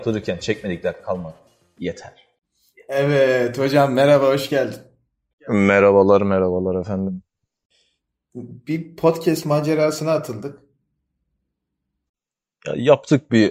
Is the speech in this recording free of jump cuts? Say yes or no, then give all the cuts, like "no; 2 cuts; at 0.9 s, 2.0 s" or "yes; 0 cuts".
yes; 0 cuts